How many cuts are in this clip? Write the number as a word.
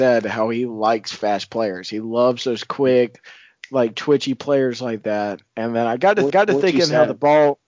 one